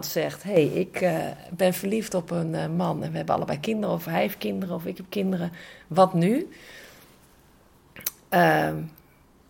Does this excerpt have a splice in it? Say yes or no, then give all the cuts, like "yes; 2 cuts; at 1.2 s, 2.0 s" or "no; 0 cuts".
no; 0 cuts